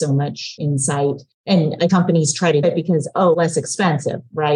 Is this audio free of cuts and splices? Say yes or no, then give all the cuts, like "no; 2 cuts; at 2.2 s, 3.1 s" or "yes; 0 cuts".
no; 3 cuts; at 1.9 s, 2.6 s, 3.3 s